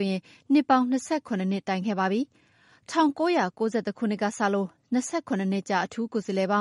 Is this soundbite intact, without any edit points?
yes; 0 cuts

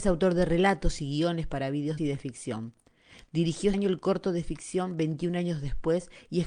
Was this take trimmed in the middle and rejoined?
yes; 2 cuts; at 2.0 s, 3.7 s

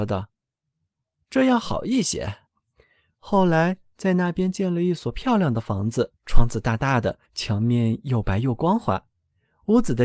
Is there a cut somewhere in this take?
yes; 3 cuts; at 2.5 s, 6.2 s, 7.2 s

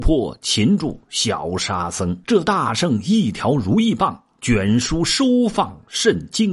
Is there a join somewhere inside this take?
yes; 1 cut; at 2.2 s

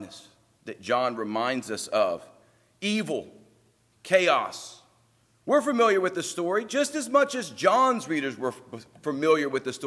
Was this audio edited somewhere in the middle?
no; 0 cuts

